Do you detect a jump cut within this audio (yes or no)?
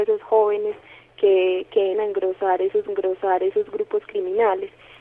yes